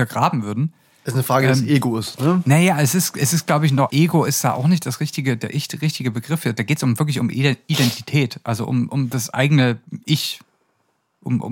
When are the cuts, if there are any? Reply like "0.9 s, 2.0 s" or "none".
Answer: 3.9 s